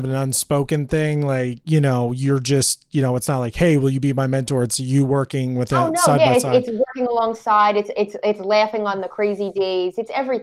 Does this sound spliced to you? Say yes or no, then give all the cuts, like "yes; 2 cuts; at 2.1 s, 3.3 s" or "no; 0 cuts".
no; 0 cuts